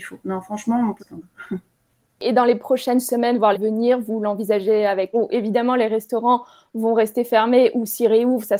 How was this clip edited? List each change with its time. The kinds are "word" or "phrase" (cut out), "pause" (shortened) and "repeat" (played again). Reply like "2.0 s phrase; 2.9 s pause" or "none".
1.0 s word; 3.5 s phrase; 5.1 s phrase